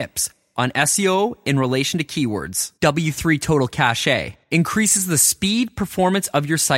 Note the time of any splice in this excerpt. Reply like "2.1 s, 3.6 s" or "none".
2.8 s, 4.4 s